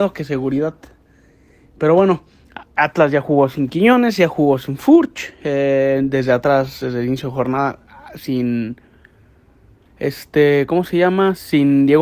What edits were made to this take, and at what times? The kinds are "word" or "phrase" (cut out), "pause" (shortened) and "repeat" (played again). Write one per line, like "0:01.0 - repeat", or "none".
none